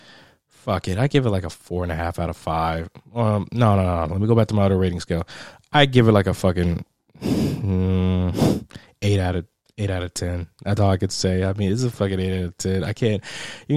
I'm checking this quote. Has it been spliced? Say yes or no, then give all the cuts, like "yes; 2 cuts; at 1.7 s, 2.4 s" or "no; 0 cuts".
no; 0 cuts